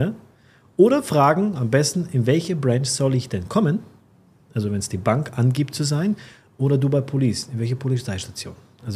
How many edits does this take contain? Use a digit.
0